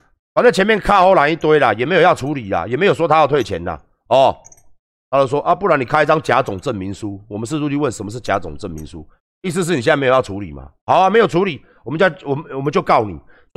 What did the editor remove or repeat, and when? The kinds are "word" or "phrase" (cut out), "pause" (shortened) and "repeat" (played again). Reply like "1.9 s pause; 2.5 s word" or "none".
none